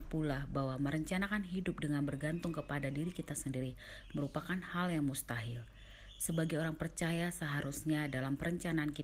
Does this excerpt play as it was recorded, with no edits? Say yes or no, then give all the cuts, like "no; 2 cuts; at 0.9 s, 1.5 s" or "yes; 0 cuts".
yes; 0 cuts